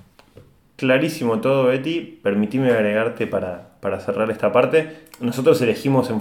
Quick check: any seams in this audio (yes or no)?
no